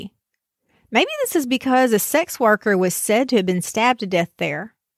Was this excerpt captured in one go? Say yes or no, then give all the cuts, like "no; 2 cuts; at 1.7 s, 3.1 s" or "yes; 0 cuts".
yes; 0 cuts